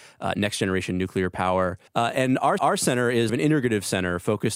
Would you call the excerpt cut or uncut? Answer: cut